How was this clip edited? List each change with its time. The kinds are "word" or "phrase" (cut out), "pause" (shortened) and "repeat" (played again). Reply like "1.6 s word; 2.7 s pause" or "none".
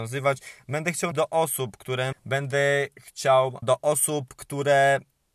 1.1 s word; 2.1 s phrase; 3.6 s word